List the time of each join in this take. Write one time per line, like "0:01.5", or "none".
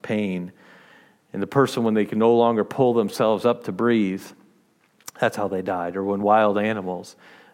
none